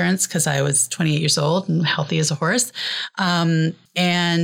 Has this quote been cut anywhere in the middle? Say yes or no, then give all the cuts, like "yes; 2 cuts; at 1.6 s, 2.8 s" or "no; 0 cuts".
no; 0 cuts